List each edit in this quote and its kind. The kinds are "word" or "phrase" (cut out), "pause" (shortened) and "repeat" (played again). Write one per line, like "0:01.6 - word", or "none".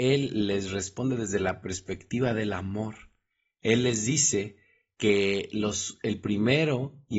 none

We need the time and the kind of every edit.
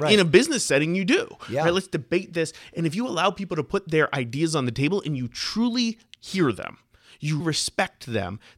0:07.4 - word

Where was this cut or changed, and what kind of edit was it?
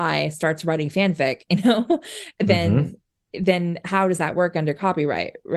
none

